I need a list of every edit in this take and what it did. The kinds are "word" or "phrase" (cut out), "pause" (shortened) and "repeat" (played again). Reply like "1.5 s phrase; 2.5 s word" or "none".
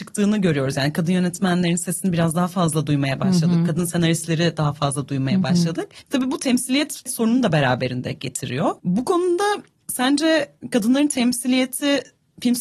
8.8 s pause

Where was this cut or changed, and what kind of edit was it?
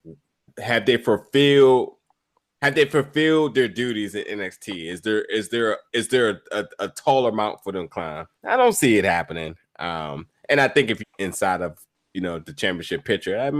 5.9 s pause; 8.3 s pause; 11.0 s phrase

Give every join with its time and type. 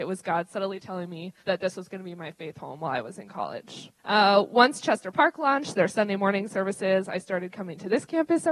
1.4 s pause; 4.0 s pause

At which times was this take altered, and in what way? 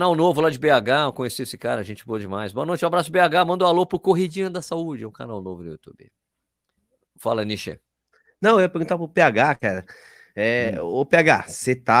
6.8 s pause

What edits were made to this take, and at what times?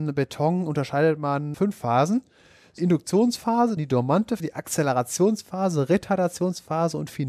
1.5 s word; 2.8 s word; 3.8 s word; 4.4 s word

